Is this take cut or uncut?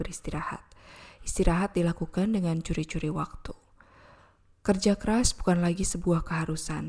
uncut